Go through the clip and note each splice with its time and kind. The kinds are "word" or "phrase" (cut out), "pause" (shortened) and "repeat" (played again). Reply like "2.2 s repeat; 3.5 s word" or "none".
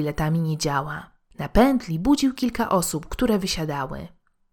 none